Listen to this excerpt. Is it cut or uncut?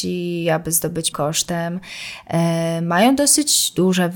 cut